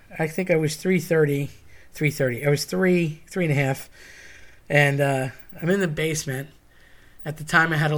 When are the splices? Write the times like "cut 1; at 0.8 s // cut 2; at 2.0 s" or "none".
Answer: none